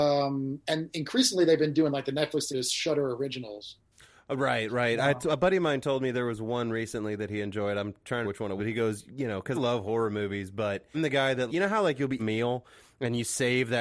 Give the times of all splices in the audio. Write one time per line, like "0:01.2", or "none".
0:02.5
0:08.2
0:08.6
0:09.5
0:10.9
0:11.5
0:12.2